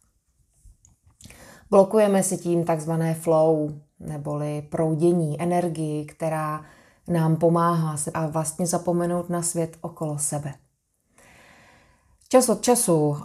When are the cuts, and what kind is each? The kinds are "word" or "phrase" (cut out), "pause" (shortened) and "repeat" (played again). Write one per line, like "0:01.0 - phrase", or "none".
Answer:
0:08.1 - phrase